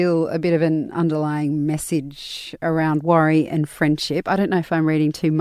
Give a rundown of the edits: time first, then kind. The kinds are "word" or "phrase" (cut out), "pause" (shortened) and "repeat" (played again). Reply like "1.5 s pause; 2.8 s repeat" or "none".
none

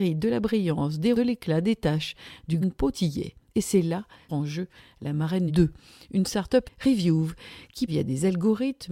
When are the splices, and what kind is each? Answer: 1.1 s word; 2.6 s word; 2.9 s word; 4.3 s word; 5.5 s word; 6.6 s word; 7.9 s word

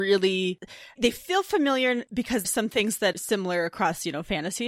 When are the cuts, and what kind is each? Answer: 1.0 s word; 2.4 s phrase; 3.1 s word

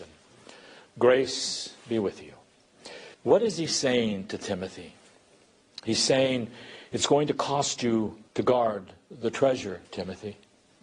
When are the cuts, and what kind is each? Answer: 3.1 s pause; 8.3 s pause; 9.8 s pause

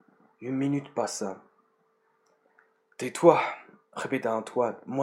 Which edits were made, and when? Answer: none

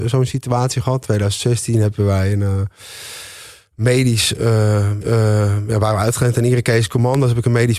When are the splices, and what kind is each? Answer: 5.0 s repeat

